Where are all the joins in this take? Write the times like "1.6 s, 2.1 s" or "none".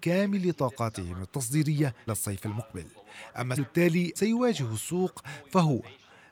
2.1 s, 3.6 s, 4.2 s